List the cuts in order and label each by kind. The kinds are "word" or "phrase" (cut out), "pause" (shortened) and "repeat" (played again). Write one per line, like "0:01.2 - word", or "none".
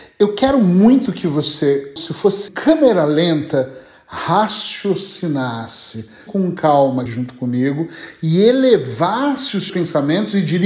0:02.0 - word
0:02.5 - word
0:06.3 - word
0:07.1 - word
0:09.7 - word